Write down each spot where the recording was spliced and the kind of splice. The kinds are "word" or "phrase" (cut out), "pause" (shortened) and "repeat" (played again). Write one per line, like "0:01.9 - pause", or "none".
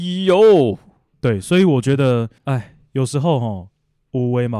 0:02.4 - pause